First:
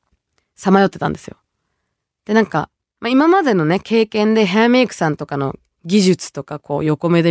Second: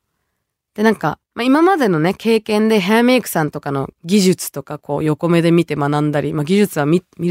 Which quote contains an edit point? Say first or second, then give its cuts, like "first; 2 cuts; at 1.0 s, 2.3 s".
second; 2 cuts; at 1.2 s, 3.9 s